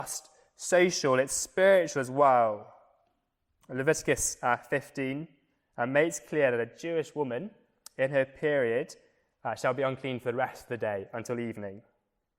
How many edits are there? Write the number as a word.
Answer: zero